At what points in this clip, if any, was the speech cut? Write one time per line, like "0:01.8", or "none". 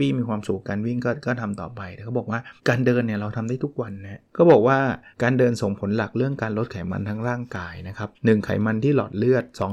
0:02.6
0:04.3
0:05.1
0:08.1